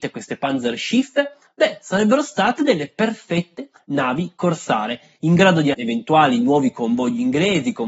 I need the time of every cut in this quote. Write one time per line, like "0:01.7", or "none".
0:05.7